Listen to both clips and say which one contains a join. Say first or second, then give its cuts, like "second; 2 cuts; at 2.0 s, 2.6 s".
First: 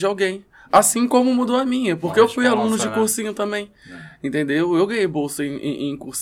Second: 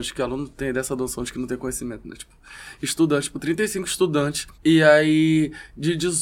second; 1 cut; at 4.5 s